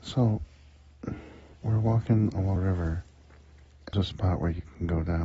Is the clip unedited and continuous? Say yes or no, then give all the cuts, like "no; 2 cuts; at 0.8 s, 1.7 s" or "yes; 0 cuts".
no; 3 cuts; at 1.5 s, 2.6 s, 3.9 s